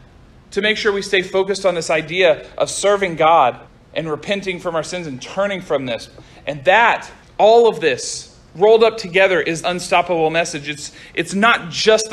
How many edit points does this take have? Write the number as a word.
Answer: three